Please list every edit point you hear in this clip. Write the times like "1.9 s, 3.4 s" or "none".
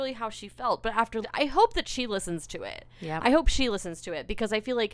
1.2 s